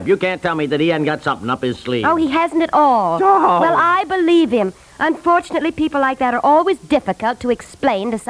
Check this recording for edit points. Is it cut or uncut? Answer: uncut